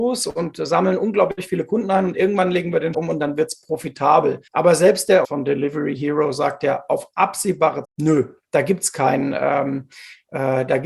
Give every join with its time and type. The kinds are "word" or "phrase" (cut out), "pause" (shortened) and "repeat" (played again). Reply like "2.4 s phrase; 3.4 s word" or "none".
2.9 s word; 4.5 s pause; 5.2 s word; 7.8 s word